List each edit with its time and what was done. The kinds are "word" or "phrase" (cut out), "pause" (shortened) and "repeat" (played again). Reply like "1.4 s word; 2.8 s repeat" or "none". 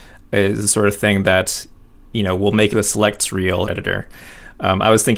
2.7 s word; 3.7 s phrase